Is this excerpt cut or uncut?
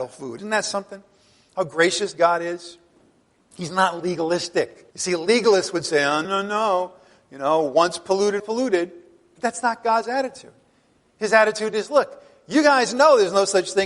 cut